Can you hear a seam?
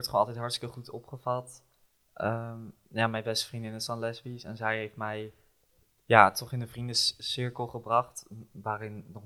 yes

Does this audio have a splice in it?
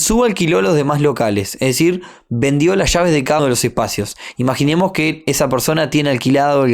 yes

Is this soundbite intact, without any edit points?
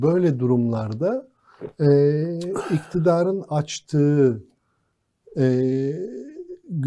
yes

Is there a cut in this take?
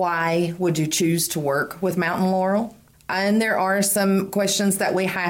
no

